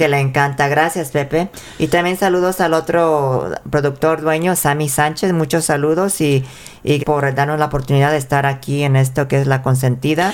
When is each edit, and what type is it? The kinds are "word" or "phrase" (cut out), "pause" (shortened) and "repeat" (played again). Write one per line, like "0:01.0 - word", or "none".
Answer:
0:07.0 - word